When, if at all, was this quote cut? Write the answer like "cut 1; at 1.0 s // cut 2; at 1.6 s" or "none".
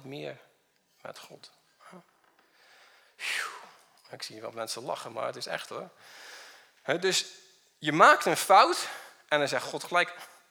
none